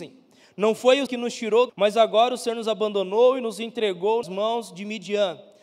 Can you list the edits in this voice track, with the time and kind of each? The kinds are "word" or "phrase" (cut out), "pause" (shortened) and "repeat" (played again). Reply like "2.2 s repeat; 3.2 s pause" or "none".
1.1 s word; 1.7 s word; 4.2 s word